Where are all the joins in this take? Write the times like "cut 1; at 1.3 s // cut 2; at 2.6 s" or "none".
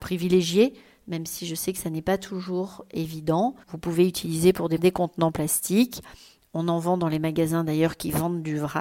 cut 1; at 3.6 s // cut 2; at 4.8 s